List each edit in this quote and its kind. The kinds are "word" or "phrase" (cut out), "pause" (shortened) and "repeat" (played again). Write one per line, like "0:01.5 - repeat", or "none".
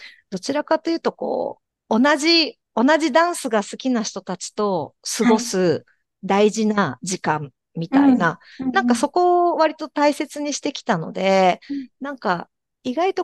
0:01.7 - pause